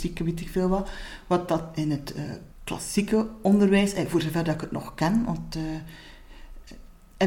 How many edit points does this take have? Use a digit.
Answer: 1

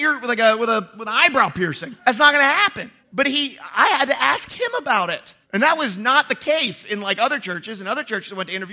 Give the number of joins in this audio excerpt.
4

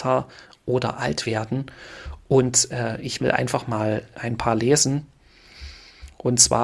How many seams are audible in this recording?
1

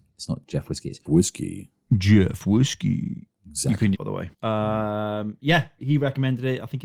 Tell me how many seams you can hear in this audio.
4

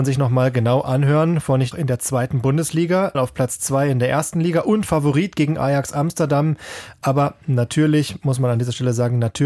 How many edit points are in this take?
2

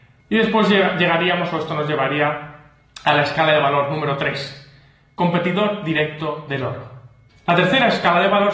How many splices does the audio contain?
0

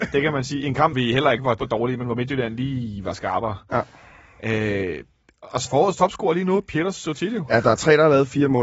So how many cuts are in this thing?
3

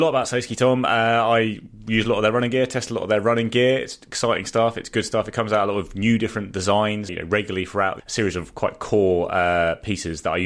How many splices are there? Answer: 2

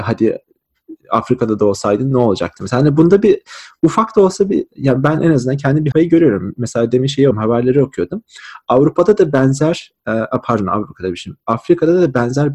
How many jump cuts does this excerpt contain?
2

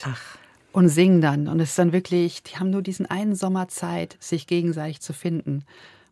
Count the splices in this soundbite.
0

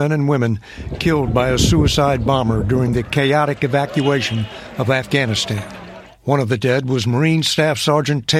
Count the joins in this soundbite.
0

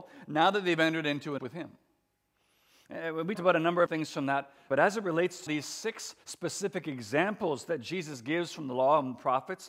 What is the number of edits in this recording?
6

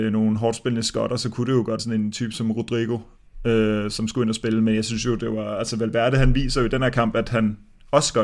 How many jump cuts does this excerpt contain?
1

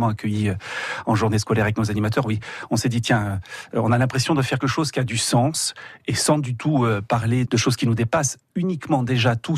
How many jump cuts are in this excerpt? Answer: 2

